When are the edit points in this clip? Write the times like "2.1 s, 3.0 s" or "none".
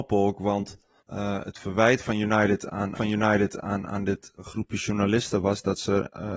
1.0 s, 2.9 s, 4.4 s